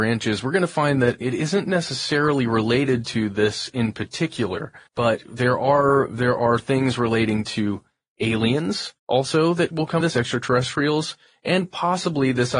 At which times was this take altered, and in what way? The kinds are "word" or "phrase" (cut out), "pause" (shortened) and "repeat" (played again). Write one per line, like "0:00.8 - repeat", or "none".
0:04.9 - pause
0:09.0 - pause
0:10.0 - word

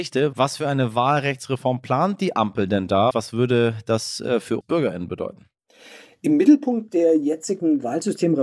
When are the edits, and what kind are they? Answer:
0:03.1 - word
0:04.6 - word

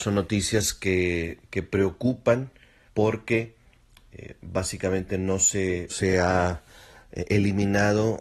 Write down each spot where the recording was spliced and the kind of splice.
0:02.9 - word
0:05.9 - word

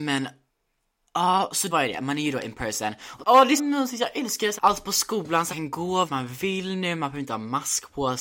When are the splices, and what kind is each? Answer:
0:01.7 - word
0:03.2 - word
0:03.6 - word
0:04.6 - word
0:05.5 - word
0:06.1 - word

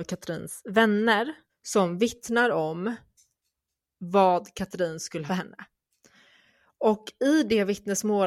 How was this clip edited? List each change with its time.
0:01.5 - pause
0:05.3 - phrase

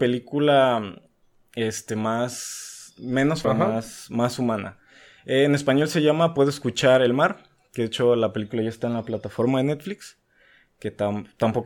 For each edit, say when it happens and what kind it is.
0:03.4 - phrase

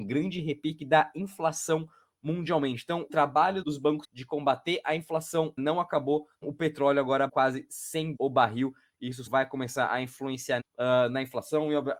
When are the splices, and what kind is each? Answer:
0:03.1 - word
0:03.6 - word
0:04.0 - word
0:05.6 - word
0:06.4 - word
0:07.3 - word
0:08.2 - word
0:09.3 - word
0:10.6 - word

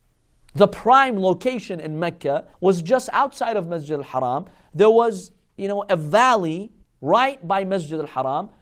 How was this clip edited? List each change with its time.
0:02.5 - pause
0:06.8 - pause

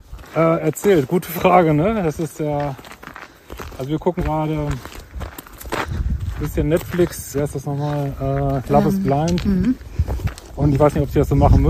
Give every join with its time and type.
0:04.2 - word
0:07.3 - word

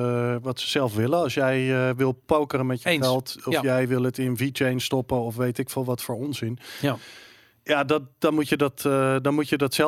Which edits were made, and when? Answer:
none

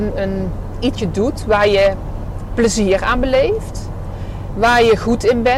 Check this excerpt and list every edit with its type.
0:00.9 - word

